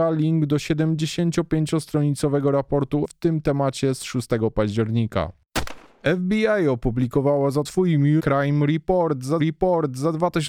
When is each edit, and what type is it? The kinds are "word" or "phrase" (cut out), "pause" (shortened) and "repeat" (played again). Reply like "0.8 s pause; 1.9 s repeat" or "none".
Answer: 3.0 s word; 7.7 s word; 8.2 s word; 9.4 s repeat